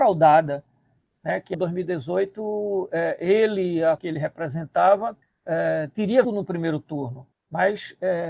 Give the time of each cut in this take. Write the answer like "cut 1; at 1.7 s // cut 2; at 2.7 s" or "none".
cut 1; at 1.5 s // cut 2; at 4.0 s // cut 3; at 5.2 s // cut 4; at 6.2 s // cut 5; at 7.3 s